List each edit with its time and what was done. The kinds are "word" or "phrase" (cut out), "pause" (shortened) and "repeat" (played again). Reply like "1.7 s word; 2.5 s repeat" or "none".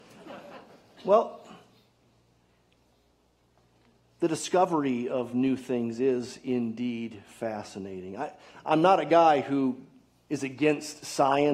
none